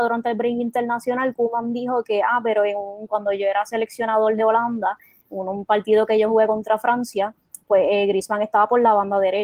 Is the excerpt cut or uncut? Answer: uncut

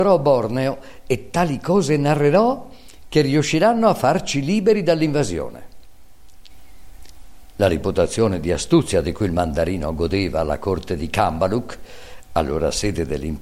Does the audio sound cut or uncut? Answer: uncut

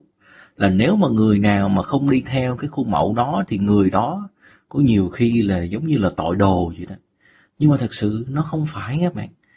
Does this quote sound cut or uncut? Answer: uncut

